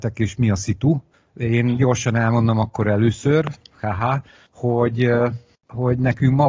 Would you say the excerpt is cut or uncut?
uncut